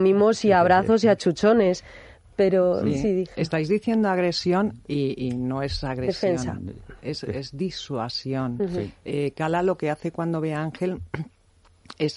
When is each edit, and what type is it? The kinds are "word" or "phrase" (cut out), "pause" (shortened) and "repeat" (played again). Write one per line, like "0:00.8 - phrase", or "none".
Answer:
none